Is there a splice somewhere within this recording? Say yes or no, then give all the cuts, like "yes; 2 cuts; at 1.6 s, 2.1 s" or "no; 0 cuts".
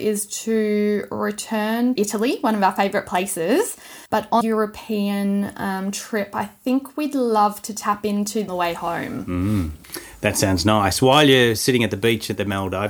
yes; 5 cuts; at 2.0 s, 4.1 s, 4.4 s, 8.5 s, 9.8 s